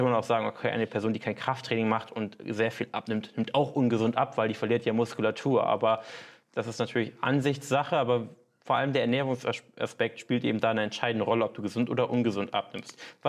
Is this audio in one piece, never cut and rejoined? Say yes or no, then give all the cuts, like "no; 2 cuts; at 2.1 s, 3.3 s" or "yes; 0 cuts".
yes; 0 cuts